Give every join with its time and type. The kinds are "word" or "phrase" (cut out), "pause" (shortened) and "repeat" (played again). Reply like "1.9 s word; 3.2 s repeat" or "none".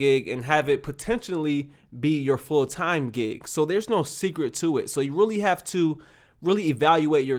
none